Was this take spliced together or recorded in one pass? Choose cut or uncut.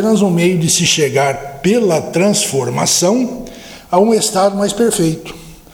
uncut